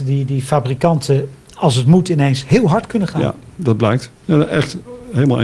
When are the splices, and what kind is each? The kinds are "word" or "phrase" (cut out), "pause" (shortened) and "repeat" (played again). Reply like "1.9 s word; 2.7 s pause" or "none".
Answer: 1.4 s pause; 4.2 s pause